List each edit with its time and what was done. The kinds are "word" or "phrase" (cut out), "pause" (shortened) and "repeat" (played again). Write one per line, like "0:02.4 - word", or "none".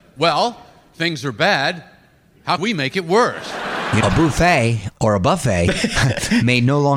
0:02.6 - word
0:04.0 - word